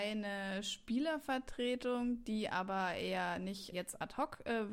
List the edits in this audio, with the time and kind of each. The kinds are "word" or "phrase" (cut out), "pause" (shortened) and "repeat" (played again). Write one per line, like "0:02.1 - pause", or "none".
0:03.7 - word